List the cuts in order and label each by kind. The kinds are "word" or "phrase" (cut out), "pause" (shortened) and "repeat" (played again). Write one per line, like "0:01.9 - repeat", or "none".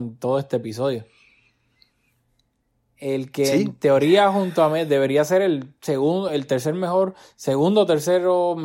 none